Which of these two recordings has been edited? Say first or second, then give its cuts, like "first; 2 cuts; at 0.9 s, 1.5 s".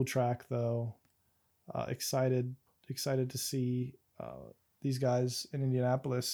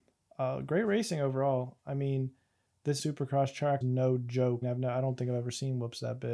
second; 3 cuts; at 3.0 s, 3.8 s, 4.6 s